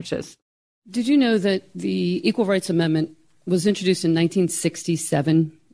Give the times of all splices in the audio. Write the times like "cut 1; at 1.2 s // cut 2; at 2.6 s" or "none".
none